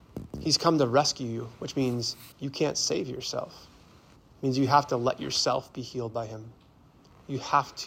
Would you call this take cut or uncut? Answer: cut